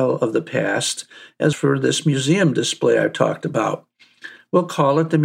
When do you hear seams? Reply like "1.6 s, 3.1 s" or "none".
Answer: 1.5 s